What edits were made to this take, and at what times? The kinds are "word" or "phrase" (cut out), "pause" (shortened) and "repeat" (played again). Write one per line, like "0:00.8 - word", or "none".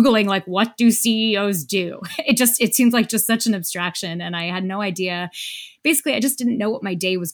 none